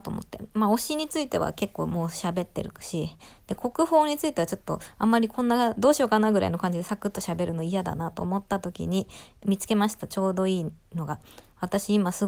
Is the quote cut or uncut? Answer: uncut